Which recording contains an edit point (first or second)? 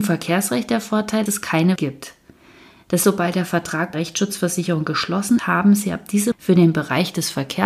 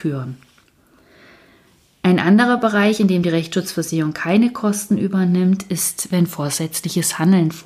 first